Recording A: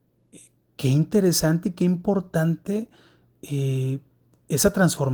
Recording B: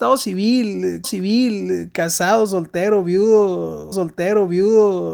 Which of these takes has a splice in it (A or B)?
B